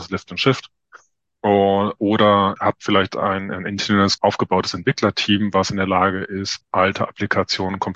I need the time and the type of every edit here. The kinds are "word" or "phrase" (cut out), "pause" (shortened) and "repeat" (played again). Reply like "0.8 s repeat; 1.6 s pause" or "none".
2.6 s word; 4.2 s word; 6.6 s word